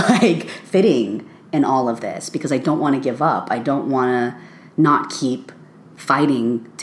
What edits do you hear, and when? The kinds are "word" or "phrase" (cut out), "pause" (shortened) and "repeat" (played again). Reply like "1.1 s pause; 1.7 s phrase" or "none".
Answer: none

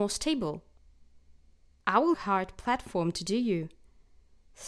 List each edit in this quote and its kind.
2.1 s phrase

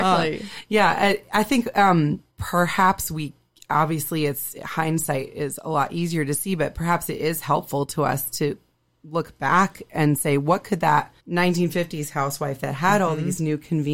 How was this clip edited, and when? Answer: 2.3 s pause; 11.2 s pause

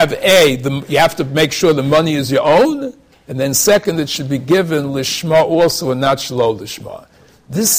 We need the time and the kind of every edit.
none

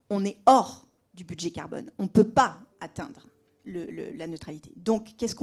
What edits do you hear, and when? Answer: 1.0 s pause; 3.9 s word

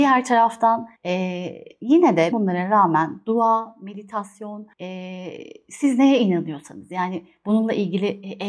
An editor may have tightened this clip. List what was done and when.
1.0 s pause; 2.3 s word; 4.7 s pause

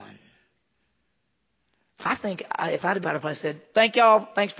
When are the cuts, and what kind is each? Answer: 3.0 s phrase

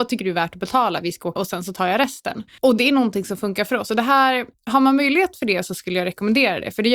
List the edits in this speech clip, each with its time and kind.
1.4 s word

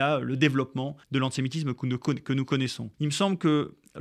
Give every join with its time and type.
1.0 s pause; 2.9 s pause

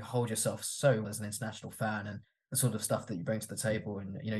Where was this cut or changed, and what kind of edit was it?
1.0 s word

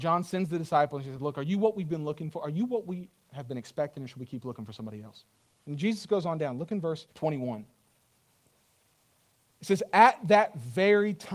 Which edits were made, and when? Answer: 5.5 s pause; 7.1 s pause

